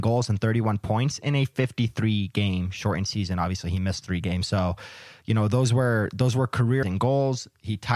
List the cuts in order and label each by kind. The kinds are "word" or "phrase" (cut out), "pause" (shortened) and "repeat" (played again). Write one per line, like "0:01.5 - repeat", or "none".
0:06.8 - word